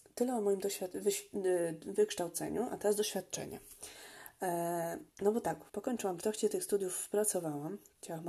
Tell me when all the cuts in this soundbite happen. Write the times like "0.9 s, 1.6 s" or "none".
5.1 s, 5.7 s, 6.2 s